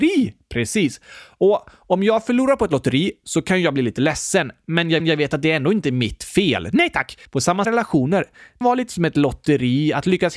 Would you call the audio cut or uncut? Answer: cut